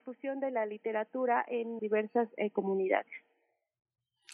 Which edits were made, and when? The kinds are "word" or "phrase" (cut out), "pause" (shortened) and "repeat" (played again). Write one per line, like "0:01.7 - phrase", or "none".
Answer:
0:01.8 - word

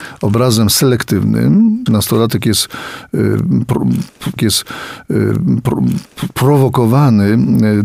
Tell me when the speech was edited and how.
0:01.9 - phrase
0:04.4 - repeat

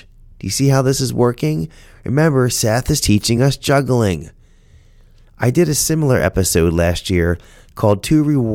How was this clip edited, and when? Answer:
none

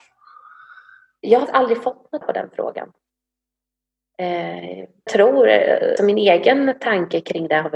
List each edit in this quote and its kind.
0:01.5 - word
0:02.2 - word
0:05.1 - word
0:06.0 - word

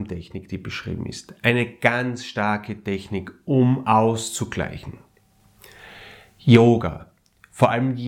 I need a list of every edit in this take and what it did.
none

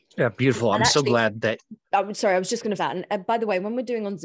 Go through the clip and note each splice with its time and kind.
0:01.8 - pause
0:02.8 - word

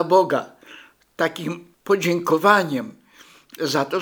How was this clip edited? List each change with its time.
0:01.7 - pause

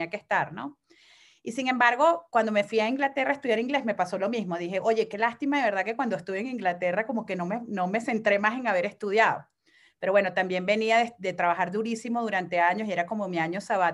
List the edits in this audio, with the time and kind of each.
none

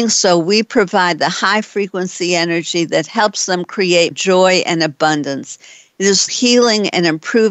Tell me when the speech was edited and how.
0:04.1 - word
0:06.3 - word

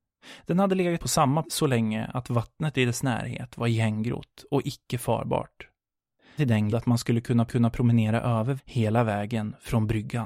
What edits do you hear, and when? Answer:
0:01.0 - word
0:01.4 - word
0:06.4 - word
0:06.7 - word
0:07.5 - repeat
0:08.6 - word

